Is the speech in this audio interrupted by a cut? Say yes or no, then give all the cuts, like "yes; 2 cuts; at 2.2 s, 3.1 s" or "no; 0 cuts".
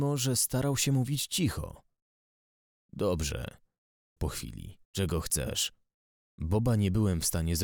yes; 2 cuts; at 4.2 s, 4.8 s